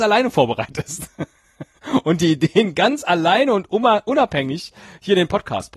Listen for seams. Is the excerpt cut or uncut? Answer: uncut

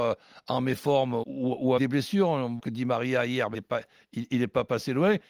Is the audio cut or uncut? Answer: cut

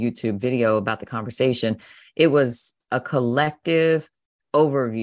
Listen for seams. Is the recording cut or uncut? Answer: uncut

